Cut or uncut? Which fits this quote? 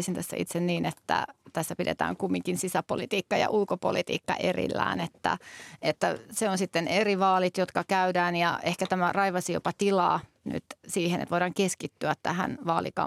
uncut